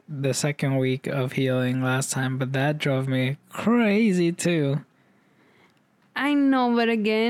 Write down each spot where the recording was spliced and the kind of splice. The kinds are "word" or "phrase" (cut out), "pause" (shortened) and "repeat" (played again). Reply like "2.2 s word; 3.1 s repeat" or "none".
none